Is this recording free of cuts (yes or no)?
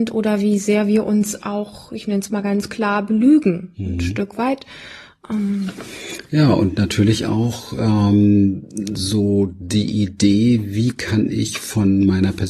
yes